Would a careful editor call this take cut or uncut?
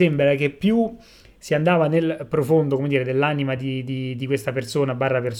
uncut